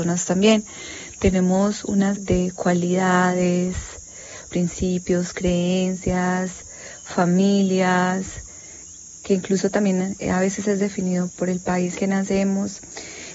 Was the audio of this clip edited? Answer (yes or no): yes